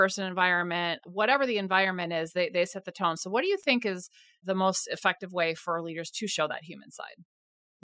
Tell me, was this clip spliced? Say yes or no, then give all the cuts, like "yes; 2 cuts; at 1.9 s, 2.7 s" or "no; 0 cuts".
no; 0 cuts